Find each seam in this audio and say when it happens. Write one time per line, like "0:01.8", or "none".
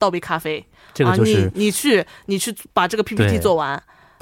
none